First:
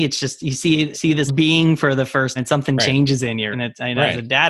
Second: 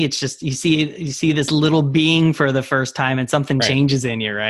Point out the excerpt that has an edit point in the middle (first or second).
first